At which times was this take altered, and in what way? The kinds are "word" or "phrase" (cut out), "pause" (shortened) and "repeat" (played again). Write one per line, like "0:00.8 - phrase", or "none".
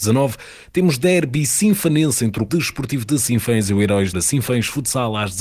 0:02.5 - word
0:04.1 - phrase